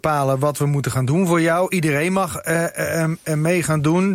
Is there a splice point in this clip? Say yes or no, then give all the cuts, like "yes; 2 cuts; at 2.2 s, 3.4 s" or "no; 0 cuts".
no; 0 cuts